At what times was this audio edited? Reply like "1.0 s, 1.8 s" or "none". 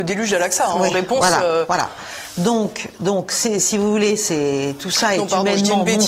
none